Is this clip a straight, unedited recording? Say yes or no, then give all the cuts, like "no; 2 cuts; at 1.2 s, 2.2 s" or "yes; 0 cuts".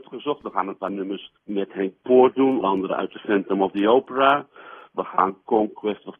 no; 2 cuts; at 1.4 s, 2.6 s